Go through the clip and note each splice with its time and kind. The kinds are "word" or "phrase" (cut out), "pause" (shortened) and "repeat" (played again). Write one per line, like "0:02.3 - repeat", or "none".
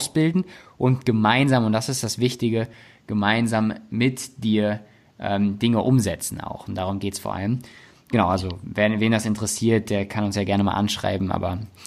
none